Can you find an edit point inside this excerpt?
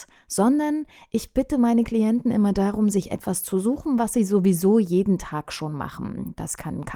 no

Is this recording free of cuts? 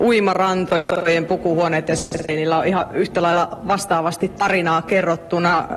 yes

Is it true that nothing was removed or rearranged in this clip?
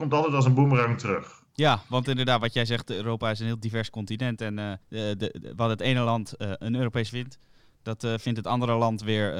no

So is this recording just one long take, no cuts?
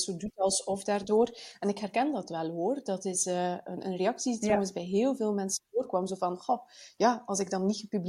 yes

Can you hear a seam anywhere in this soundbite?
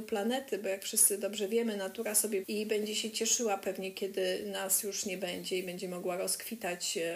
yes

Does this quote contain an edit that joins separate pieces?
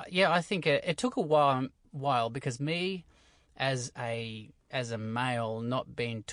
no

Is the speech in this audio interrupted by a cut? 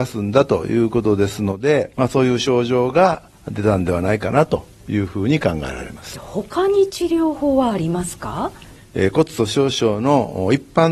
yes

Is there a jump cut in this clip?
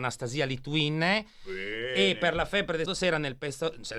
yes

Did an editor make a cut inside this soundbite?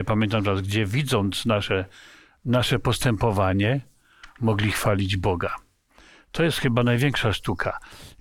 no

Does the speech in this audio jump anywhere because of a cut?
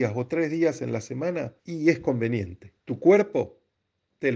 yes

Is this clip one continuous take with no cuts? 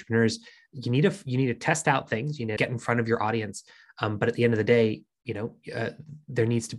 no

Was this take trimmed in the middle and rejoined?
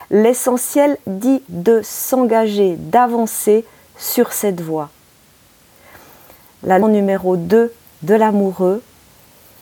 yes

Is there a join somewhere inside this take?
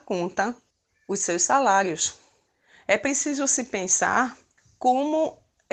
no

